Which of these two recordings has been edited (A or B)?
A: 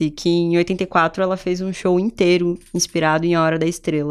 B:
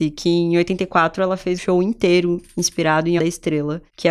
B